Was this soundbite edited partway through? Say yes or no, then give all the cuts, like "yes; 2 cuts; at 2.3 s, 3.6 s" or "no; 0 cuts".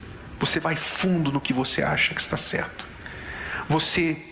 no; 0 cuts